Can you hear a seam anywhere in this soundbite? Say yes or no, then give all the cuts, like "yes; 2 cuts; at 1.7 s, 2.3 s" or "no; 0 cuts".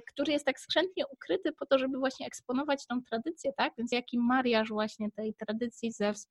yes; 1 cut; at 3.9 s